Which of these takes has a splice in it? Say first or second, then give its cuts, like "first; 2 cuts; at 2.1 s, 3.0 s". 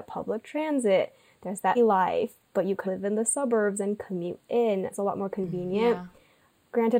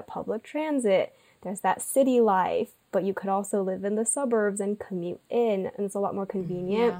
first; 3 cuts; at 1.7 s, 2.8 s, 4.9 s